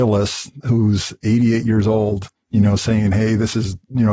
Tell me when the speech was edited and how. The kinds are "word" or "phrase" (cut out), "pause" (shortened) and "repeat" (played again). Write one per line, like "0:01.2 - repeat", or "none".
0:02.4 - pause